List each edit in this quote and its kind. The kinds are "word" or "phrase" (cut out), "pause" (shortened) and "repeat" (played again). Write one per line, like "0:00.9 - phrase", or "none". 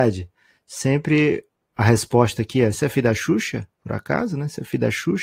0:03.8 - pause